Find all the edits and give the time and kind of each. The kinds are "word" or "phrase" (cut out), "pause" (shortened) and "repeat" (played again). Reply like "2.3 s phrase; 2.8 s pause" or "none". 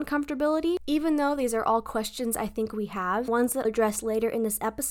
3.3 s word; 3.6 s word